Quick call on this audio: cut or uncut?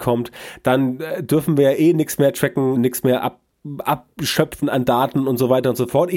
cut